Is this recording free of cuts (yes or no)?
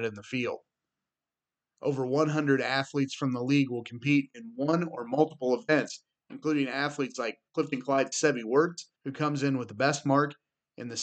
no